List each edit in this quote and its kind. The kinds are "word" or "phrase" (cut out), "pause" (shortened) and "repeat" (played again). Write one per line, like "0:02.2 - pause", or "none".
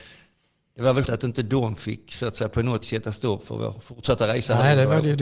0:01.0 - word
0:02.8 - word